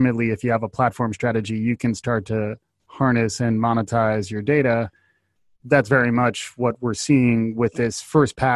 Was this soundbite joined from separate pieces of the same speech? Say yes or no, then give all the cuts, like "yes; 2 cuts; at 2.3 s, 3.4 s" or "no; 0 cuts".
no; 0 cuts